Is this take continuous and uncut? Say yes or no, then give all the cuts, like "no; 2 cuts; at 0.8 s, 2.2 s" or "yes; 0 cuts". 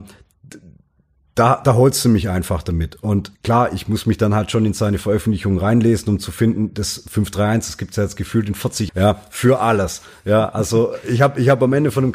no; 2 cuts; at 3.3 s, 8.9 s